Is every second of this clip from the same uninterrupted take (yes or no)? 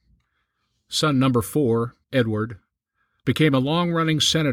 no